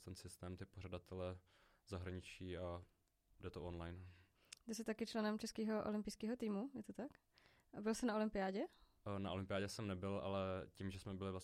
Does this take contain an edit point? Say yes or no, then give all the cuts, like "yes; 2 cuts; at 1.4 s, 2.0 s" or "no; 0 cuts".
no; 0 cuts